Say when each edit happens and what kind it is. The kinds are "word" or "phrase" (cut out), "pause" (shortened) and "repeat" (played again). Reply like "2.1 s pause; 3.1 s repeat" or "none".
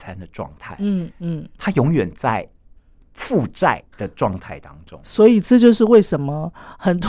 1.6 s pause; 2.8 s pause; 3.9 s pause